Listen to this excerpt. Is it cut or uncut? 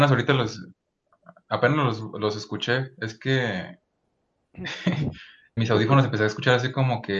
cut